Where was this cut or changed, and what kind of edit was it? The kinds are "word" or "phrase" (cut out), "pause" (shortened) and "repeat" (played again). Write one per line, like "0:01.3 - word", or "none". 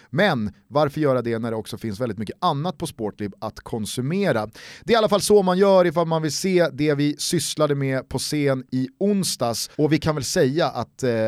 0:09.7 - pause